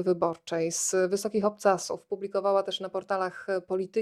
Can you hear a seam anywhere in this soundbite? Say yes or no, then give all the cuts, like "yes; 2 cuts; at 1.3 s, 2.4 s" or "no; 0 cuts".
no; 0 cuts